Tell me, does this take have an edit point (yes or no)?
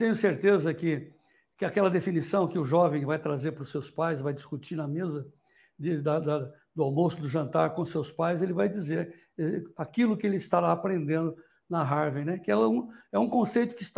no